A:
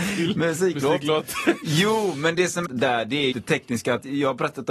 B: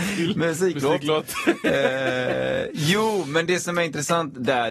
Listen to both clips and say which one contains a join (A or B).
A